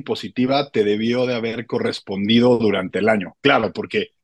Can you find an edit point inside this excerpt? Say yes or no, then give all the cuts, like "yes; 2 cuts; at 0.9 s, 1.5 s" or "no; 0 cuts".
no; 0 cuts